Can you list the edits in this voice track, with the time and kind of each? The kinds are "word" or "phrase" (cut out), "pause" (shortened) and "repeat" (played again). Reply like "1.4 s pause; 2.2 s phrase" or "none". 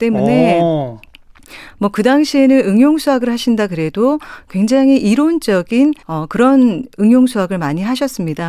6.0 s pause